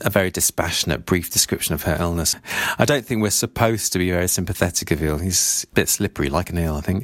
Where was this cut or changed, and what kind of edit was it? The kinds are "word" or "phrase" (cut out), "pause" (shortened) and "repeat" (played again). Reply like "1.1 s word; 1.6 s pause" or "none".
none